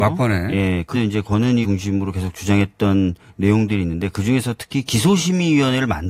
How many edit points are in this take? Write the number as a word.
two